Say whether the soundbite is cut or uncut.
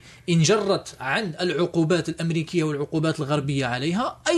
uncut